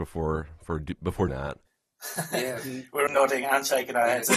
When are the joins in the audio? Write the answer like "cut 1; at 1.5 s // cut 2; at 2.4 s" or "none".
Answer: cut 1; at 1.3 s // cut 2; at 1.7 s // cut 3; at 3.1 s